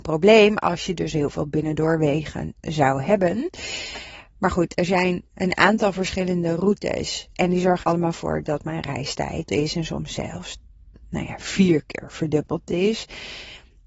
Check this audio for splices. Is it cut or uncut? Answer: cut